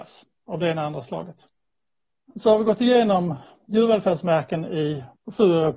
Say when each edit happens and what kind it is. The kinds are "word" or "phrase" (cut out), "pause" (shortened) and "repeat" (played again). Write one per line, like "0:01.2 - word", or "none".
none